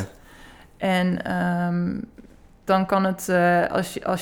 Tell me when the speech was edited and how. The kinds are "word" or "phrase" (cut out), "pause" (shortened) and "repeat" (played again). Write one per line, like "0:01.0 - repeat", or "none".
0:02.7 - word